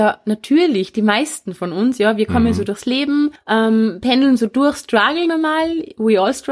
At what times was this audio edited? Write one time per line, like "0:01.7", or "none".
0:03.4